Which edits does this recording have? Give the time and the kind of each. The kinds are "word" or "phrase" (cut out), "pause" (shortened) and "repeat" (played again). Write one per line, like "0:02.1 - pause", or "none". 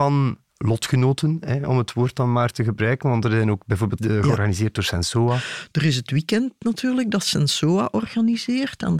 0:04.0 - word